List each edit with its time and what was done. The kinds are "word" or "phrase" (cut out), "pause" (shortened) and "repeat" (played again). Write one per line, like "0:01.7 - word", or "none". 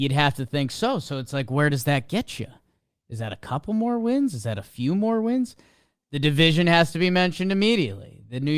none